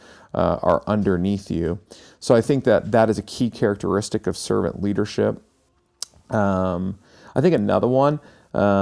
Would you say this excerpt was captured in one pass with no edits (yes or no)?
yes